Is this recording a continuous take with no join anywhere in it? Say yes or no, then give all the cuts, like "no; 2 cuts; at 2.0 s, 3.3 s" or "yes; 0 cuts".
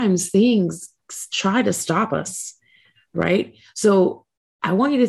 yes; 0 cuts